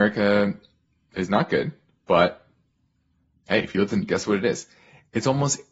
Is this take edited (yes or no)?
yes